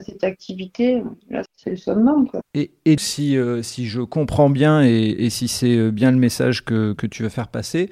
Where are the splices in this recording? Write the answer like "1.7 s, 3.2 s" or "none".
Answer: 1.5 s, 3.0 s